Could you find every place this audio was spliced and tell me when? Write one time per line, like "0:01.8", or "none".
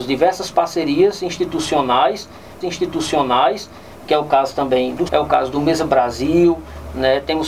0:02.6
0:05.1